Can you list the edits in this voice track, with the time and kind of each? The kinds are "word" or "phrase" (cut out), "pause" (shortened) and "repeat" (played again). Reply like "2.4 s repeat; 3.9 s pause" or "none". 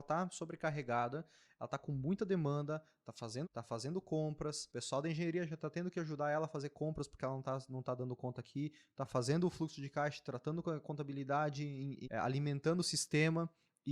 3.4 s word; 4.7 s pause; 12.0 s word